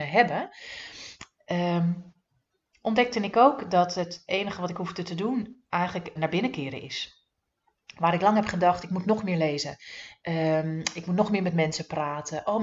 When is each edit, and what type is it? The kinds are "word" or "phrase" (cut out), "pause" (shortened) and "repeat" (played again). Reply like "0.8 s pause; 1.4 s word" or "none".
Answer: 6.2 s word